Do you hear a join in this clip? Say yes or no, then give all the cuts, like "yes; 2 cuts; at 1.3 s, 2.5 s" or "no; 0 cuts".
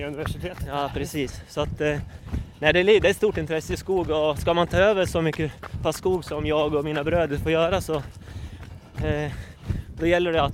no; 0 cuts